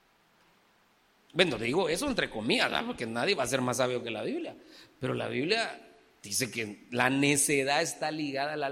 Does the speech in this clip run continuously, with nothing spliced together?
yes; 0 cuts

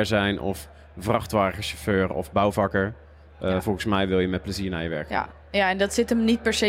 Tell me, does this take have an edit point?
no; 0 cuts

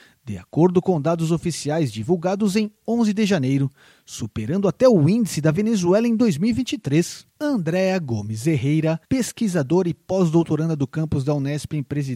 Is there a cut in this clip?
yes; 2 cuts; at 7.3 s, 9.0 s

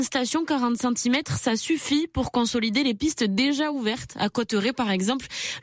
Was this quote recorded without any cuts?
yes; 0 cuts

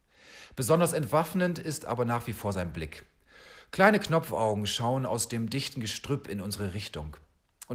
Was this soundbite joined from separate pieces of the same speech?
no; 0 cuts

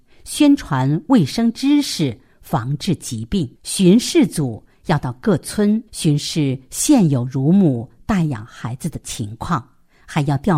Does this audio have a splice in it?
yes; 2 cuts; at 3.5 s, 5.9 s

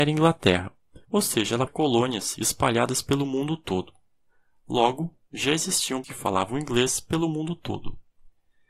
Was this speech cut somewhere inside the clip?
yes; 3 cuts; at 1.0 s, 1.7 s, 6.0 s

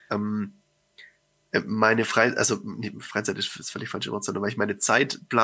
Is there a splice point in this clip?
no; 0 cuts

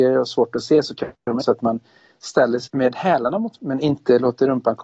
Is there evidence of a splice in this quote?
yes; 3 cuts; at 1.4 s, 2.7 s, 3.6 s

